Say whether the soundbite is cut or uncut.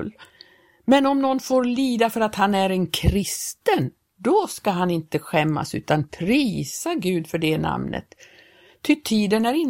uncut